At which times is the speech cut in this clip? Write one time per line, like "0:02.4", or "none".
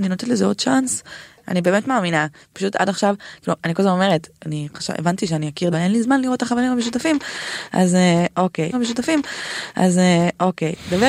0:05.7
0:08.7